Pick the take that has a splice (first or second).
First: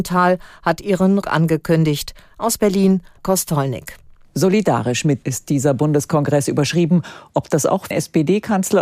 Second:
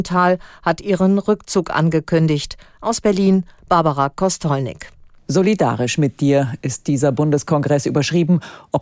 first